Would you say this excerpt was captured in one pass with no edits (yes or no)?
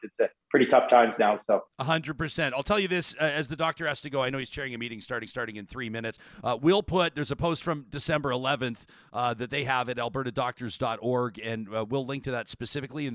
no